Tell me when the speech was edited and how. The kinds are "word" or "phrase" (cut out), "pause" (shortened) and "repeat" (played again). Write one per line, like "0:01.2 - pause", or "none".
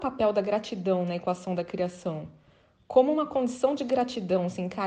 none